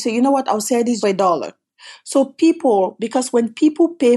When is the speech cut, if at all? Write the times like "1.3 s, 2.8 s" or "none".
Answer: 1.0 s